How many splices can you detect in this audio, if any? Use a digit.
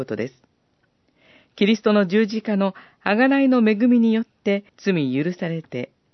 1